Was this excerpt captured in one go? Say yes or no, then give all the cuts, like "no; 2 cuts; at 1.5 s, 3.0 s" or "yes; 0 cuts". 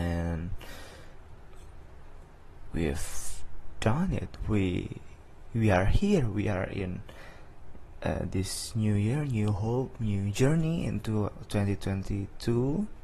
yes; 0 cuts